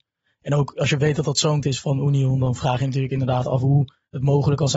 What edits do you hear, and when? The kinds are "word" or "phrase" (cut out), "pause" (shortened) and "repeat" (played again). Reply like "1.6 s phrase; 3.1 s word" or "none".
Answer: 1.6 s word